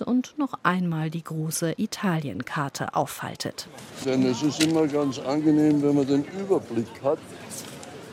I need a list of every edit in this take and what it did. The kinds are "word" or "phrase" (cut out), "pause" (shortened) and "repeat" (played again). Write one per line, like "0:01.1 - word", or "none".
none